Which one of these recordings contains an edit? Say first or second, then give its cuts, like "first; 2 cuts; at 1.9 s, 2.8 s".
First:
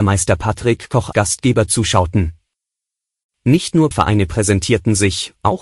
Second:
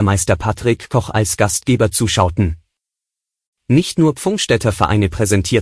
first; 2 cuts; at 1.1 s, 3.9 s